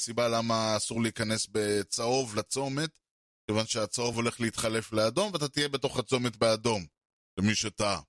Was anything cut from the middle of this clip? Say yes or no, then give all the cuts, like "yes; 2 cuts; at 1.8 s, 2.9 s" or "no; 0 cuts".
no; 0 cuts